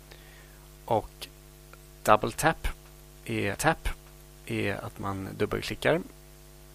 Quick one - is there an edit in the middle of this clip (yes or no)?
yes